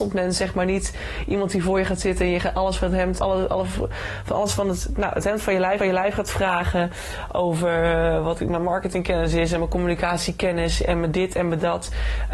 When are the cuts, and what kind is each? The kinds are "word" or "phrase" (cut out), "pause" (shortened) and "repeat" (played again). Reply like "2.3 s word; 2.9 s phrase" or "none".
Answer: 3.2 s word; 5.8 s repeat